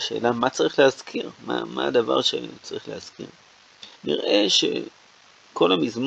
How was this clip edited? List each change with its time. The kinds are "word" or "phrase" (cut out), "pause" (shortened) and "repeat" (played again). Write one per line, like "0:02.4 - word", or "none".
0:01.4 - pause
0:04.0 - pause

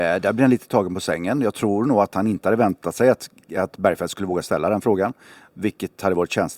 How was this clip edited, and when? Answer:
none

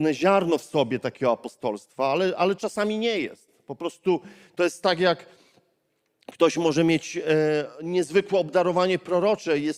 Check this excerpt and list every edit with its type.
none

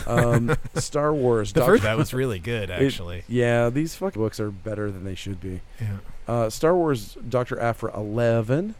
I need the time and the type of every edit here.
0:01.8 - phrase
0:04.2 - word

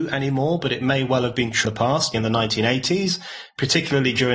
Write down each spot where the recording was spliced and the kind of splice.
0:01.6 - word
0:02.1 - word

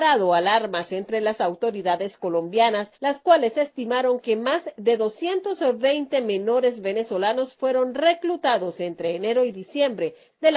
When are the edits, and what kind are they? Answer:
0:02.9 - pause

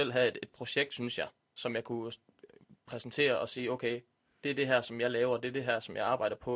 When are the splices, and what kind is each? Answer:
none

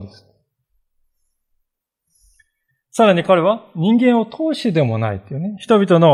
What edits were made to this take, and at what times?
none

